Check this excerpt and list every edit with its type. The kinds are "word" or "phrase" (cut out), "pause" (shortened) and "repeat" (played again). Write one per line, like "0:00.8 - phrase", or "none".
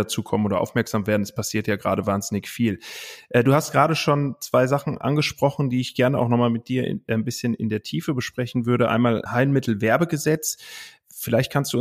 0:09.3 - word

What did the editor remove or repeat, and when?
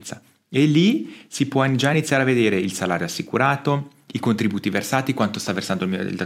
none

